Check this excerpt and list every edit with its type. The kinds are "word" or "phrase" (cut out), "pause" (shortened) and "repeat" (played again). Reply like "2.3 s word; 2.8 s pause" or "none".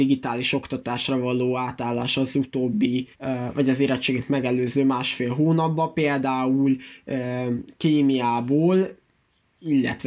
3.1 s pause